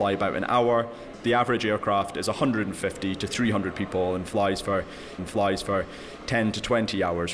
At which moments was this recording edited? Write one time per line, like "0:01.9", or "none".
0:01.1
0:05.2